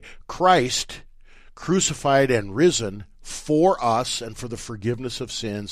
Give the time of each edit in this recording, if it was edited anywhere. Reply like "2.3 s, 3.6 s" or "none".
none